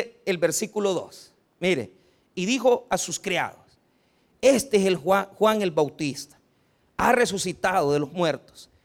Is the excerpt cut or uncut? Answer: uncut